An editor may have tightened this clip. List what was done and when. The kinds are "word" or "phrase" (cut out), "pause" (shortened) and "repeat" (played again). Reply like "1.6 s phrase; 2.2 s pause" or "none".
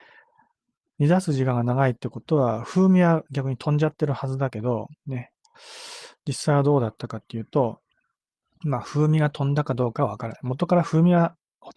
5.0 s pause